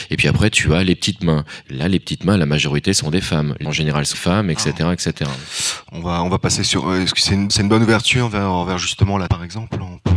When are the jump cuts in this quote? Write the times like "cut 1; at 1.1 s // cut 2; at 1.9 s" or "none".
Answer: cut 1; at 3.6 s // cut 2; at 4.1 s // cut 3; at 7.5 s // cut 4; at 9.3 s